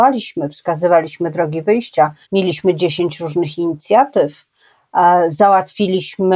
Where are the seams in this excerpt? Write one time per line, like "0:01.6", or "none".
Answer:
0:02.2